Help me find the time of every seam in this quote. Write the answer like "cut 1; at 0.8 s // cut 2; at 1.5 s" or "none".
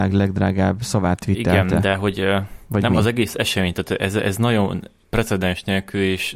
none